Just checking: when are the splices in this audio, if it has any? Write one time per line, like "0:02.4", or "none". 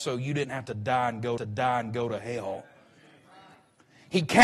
0:01.4